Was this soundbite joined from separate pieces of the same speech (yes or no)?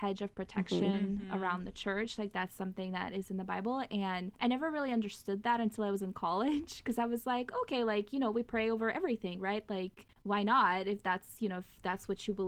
yes